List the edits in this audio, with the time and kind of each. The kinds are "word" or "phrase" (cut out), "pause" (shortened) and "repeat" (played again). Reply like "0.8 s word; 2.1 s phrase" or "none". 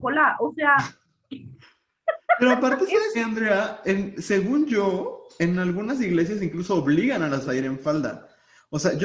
3.1 s word; 7.4 s word